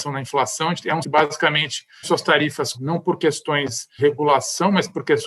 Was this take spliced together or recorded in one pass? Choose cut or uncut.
cut